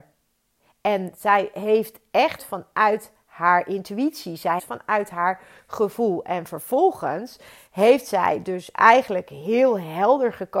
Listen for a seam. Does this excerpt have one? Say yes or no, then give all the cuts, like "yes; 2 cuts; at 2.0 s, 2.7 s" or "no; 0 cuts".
yes; 2 cuts; at 2.4 s, 4.6 s